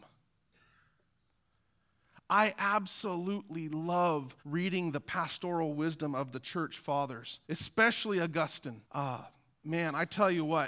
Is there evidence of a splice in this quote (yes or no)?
yes